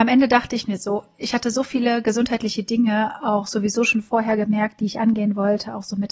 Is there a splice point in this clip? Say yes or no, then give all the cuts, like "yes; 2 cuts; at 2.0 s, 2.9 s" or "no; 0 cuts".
no; 0 cuts